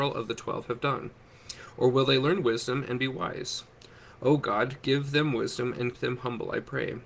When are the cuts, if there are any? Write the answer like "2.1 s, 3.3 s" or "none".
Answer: 5.9 s